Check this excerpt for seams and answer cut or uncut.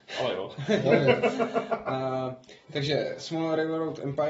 uncut